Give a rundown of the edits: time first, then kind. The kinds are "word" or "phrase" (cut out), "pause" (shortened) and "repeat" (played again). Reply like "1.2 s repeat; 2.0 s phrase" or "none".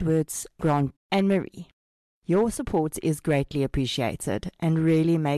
1.0 s word; 1.9 s pause